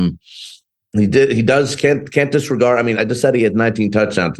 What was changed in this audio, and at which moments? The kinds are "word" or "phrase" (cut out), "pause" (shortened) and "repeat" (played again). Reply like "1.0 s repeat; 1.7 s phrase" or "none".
2.9 s word